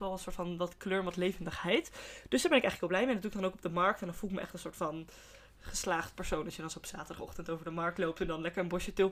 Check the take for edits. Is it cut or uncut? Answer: uncut